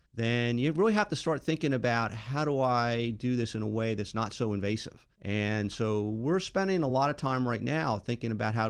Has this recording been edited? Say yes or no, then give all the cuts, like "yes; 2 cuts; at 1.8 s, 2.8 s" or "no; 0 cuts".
no; 0 cuts